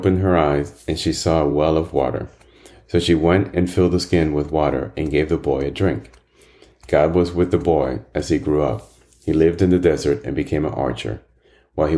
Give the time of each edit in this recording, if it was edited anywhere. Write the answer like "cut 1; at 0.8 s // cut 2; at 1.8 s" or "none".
none